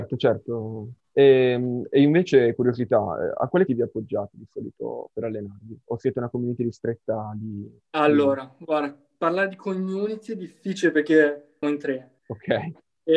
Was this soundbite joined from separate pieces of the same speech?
yes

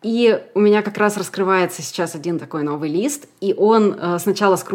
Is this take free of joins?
yes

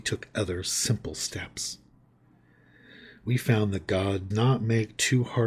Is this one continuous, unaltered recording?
no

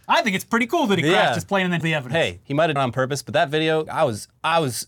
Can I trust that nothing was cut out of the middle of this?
no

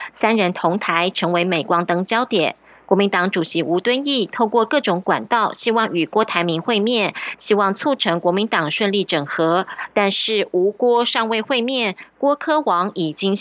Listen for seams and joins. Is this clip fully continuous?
yes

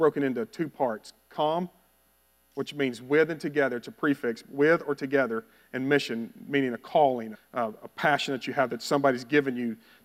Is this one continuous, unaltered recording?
no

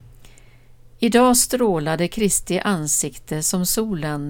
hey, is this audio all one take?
yes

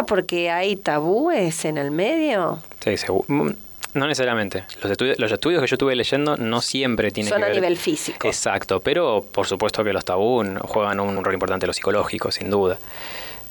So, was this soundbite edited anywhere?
yes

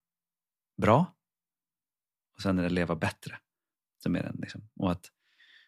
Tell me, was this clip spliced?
no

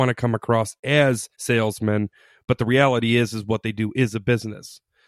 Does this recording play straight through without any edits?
no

